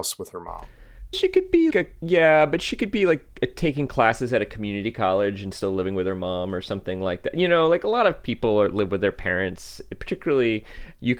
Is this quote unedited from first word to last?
no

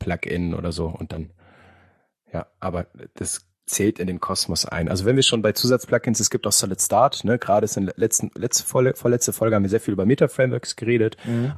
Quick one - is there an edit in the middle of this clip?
no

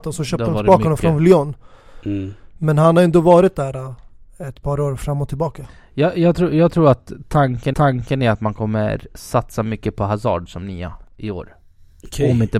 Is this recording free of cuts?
no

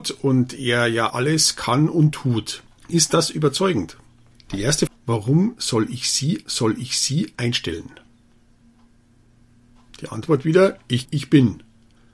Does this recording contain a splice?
yes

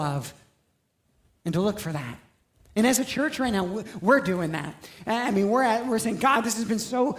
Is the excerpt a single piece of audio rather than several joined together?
yes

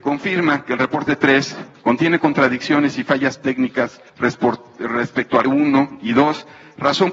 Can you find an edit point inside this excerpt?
yes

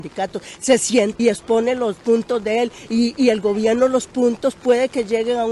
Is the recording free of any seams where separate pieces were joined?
no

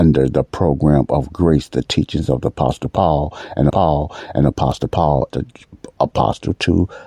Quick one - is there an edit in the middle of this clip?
yes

